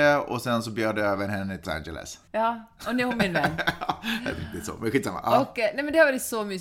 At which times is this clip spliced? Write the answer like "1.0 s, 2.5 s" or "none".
1.6 s, 2.3 s, 4.3 s